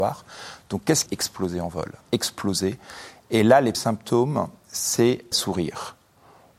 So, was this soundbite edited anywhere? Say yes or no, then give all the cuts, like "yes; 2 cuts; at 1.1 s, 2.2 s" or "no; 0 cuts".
yes; 4 cuts; at 1.1 s, 2.0 s, 3.7 s, 5.3 s